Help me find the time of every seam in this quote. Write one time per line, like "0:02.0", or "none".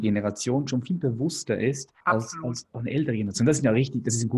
0:02.0

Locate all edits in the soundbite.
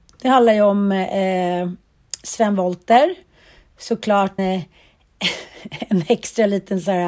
0:04.4

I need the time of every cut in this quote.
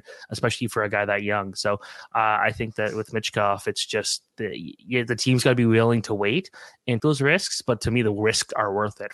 0:07.0

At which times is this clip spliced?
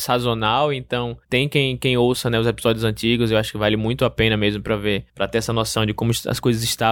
0:01.2
0:05.1

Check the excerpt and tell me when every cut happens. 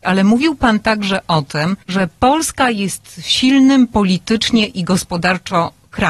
0:01.8

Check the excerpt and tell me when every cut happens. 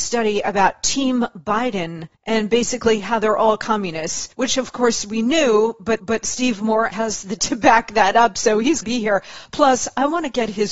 0:02.1
0:04.3
0:06.0
0:06.9
0:07.4
0:08.8

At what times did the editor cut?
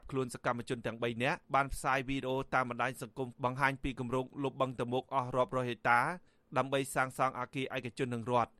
0:01.4
0:03.3

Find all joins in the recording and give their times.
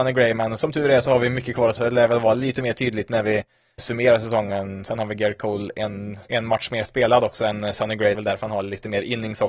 0:01.8
0:03.8
0:06.3
0:08.1

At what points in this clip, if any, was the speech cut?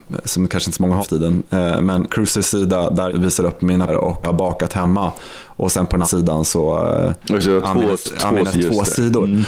0:01.0
0:02.1
0:03.1
0:03.9
0:04.2
0:06.0
0:08.5

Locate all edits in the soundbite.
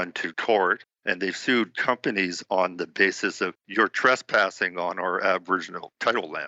none

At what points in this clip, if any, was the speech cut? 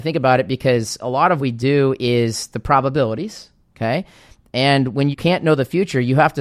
0:01.4
0:05.1

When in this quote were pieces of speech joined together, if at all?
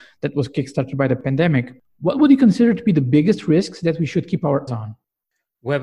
0:04.7

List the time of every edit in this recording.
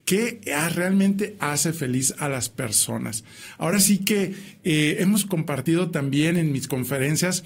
none

